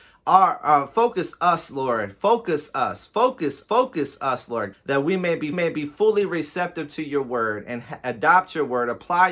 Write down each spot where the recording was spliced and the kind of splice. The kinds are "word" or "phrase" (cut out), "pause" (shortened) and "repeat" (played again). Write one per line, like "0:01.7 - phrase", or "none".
0:03.6 - repeat
0:04.7 - word
0:05.5 - repeat